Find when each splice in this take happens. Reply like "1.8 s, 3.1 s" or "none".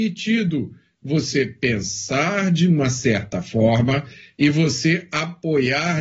none